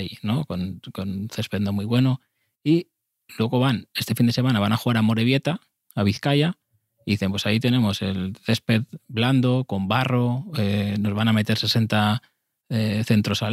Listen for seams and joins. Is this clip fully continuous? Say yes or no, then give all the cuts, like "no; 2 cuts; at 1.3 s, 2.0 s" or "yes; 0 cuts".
yes; 0 cuts